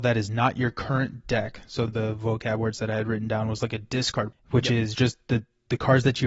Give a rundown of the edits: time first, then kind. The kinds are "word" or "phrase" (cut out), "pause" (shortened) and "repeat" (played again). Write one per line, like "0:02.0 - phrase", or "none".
0:01.9 - phrase
0:04.3 - word